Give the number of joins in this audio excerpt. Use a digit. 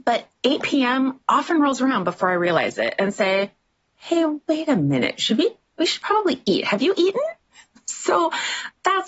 0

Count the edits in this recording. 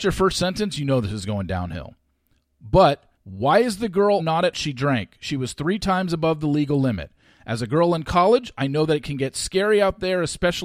3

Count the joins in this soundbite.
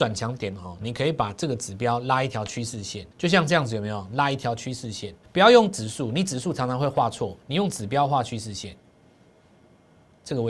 3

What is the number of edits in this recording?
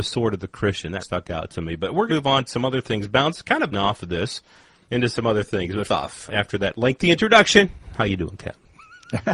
6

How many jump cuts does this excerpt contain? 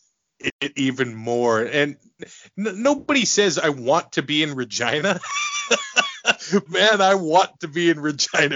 2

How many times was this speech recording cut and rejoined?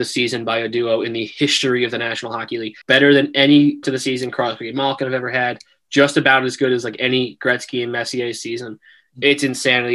2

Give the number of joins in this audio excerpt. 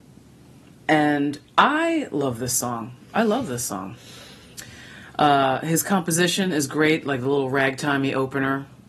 0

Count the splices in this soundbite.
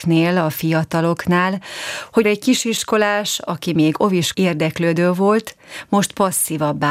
2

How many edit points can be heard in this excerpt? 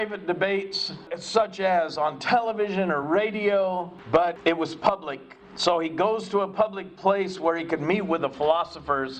0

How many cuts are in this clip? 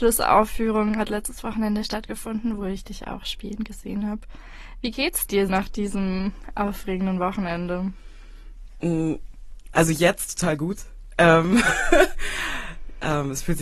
1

